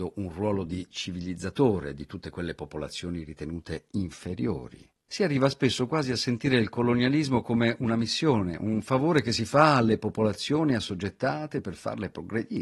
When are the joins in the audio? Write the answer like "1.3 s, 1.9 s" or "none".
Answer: none